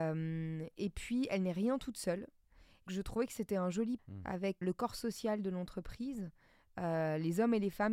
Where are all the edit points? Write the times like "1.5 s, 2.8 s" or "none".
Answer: 2.9 s, 4.0 s, 4.6 s